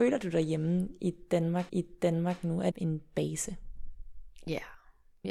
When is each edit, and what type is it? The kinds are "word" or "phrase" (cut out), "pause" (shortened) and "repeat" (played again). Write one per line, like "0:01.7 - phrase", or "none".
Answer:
0:01.7 - repeat
0:02.7 - phrase